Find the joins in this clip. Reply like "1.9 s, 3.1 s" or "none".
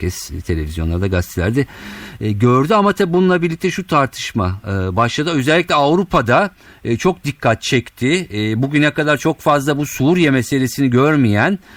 none

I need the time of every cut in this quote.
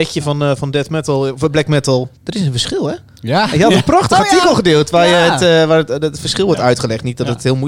2.2 s

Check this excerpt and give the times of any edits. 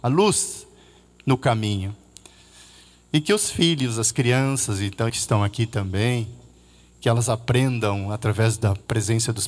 5.1 s

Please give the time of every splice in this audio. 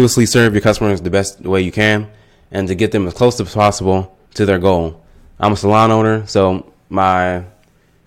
4.2 s

